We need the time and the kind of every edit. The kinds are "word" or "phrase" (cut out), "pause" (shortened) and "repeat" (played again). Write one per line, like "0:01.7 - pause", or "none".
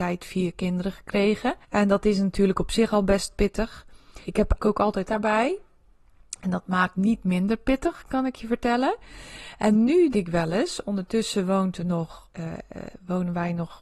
0:01.6 - pause
0:04.2 - pause
0:04.6 - word
0:05.1 - word
0:06.9 - word
0:10.1 - word
0:12.3 - pause